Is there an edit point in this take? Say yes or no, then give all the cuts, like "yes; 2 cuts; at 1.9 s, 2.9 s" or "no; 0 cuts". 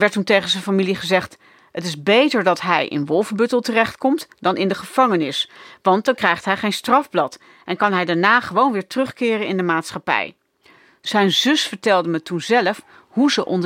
no; 0 cuts